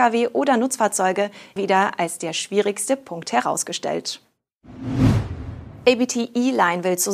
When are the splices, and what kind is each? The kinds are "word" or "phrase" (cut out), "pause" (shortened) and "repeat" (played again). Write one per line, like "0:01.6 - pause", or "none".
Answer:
0:01.6 - word

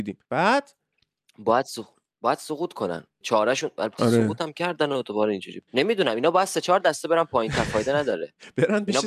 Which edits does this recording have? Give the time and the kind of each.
0:03.2 - word

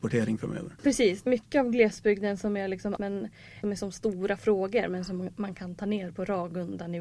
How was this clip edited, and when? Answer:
0:01.3 - word
0:03.0 - word
0:03.6 - phrase

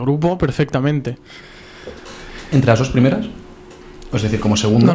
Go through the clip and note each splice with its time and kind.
none

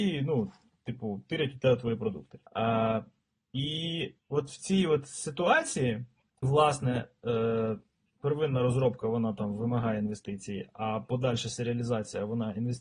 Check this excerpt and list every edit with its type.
0:02.5 - pause
0:04.2 - pause
0:06.4 - word

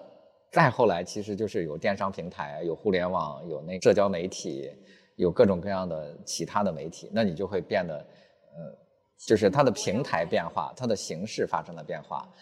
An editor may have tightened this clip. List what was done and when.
none

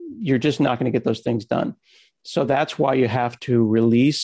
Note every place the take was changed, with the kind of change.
none

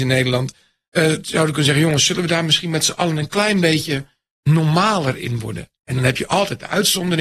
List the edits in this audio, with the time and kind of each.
none

